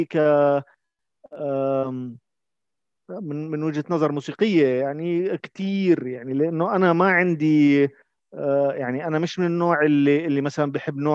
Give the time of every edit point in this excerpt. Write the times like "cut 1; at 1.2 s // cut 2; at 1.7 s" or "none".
none